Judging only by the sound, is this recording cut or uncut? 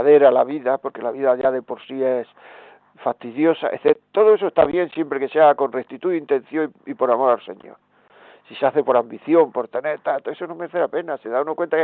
uncut